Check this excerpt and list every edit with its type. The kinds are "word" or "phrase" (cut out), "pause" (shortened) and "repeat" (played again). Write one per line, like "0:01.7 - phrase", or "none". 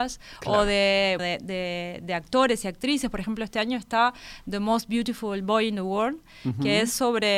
0:01.2 - word